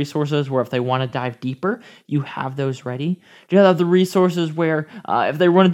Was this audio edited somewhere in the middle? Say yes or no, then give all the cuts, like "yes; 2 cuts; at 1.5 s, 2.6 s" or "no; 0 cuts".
no; 0 cuts